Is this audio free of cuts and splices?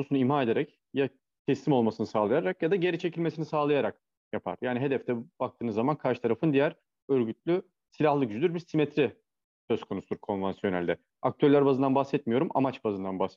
yes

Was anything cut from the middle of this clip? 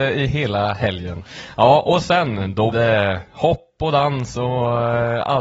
yes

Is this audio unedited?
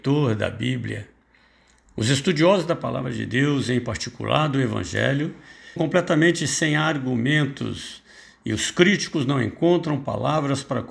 no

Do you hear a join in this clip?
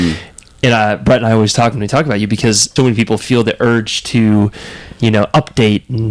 yes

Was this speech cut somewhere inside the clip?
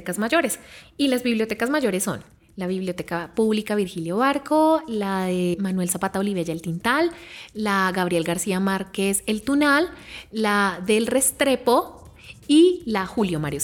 no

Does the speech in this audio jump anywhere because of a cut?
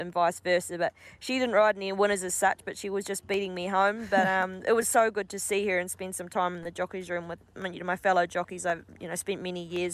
no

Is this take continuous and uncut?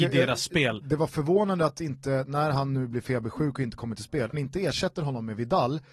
no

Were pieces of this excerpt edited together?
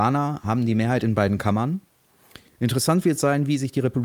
no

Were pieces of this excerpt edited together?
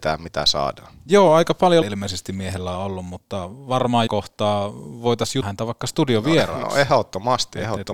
yes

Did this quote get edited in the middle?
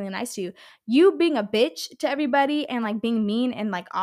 no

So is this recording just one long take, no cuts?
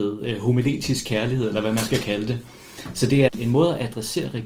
no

